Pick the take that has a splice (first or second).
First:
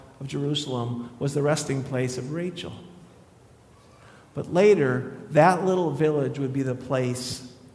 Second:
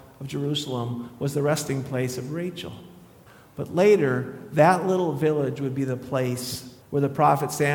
second